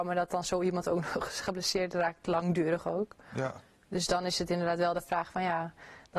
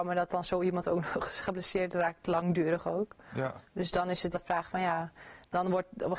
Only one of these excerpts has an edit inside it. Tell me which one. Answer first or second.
second